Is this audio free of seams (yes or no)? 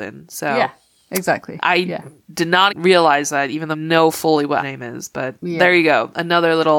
no